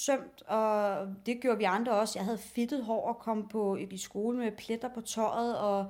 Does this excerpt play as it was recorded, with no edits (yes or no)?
yes